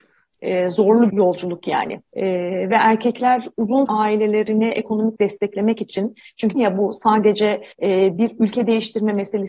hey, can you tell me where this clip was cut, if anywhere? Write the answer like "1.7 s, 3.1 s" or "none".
1.1 s, 2.1 s, 3.9 s, 5.2 s, 6.5 s, 7.7 s

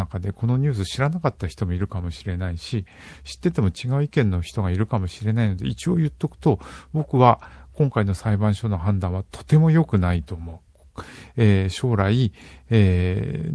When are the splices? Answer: none

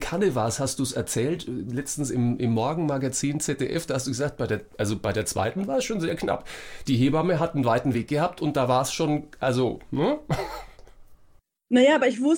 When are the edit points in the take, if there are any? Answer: none

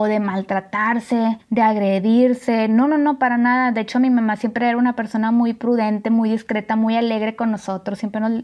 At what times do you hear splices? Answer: 1.4 s

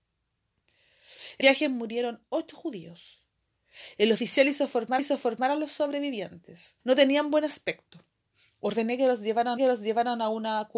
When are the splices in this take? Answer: 1.4 s, 5.0 s, 6.8 s, 9.6 s

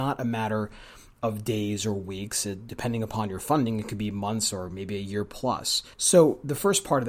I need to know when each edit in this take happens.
5.9 s

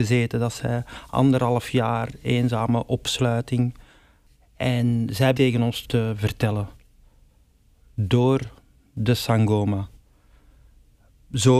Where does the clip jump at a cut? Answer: 5.3 s, 5.8 s

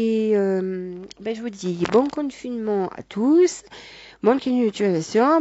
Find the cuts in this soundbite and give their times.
none

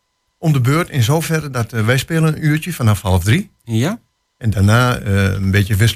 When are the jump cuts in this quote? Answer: none

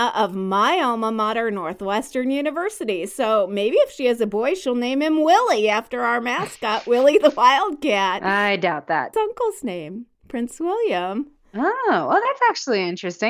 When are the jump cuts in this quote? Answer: 9.1 s, 10.1 s

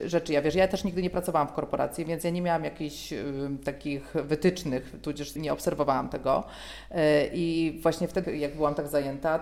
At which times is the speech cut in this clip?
5.4 s, 8.2 s

